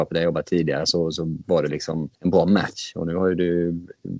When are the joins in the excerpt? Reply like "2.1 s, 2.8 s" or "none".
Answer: 2.1 s